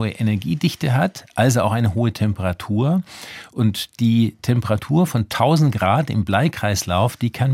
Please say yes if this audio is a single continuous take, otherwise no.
yes